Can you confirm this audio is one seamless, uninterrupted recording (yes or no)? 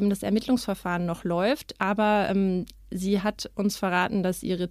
yes